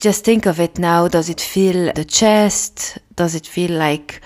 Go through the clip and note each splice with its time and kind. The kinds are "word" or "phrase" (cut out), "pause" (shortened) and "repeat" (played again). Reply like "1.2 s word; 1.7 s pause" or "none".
1.9 s phrase